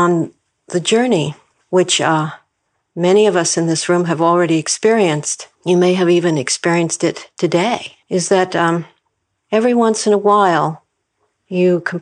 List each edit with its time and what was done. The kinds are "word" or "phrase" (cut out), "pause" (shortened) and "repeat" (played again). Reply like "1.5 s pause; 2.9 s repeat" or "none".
1.5 s pause; 5.6 s pause; 8.0 s pause